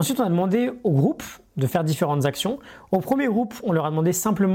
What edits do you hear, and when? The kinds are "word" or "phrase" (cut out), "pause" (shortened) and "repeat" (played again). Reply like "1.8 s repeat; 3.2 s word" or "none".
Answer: none